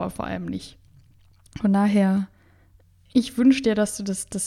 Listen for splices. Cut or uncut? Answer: uncut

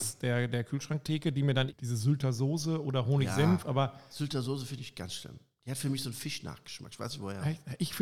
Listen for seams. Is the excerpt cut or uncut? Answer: cut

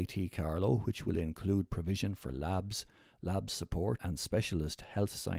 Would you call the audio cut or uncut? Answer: uncut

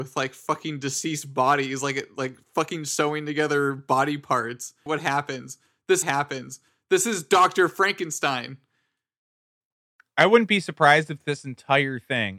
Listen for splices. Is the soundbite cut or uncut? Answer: cut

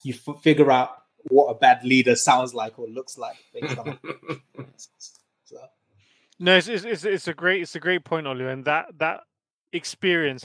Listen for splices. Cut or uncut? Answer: uncut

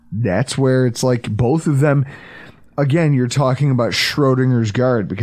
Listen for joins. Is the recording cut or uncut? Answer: uncut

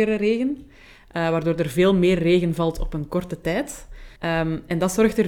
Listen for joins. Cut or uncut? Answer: cut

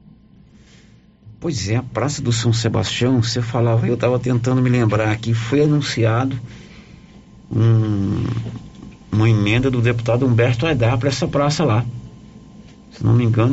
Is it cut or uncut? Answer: uncut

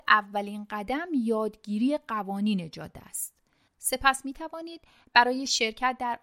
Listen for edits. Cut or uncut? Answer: uncut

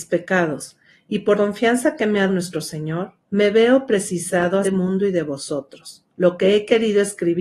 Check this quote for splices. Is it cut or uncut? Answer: cut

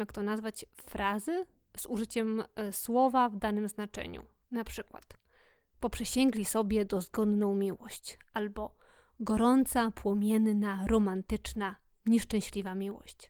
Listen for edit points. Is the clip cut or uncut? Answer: uncut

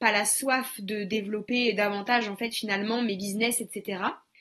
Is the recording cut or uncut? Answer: uncut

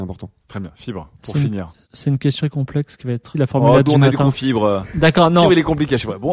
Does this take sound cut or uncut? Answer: cut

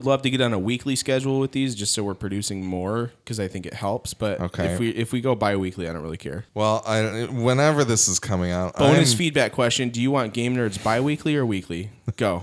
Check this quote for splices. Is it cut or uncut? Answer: cut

